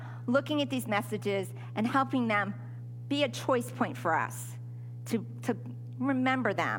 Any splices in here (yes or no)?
no